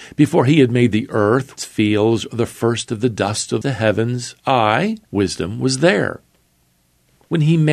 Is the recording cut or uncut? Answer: cut